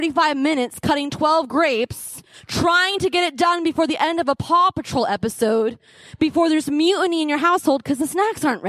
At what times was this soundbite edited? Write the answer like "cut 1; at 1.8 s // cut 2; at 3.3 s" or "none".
cut 1; at 2.3 s